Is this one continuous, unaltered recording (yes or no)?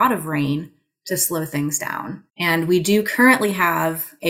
yes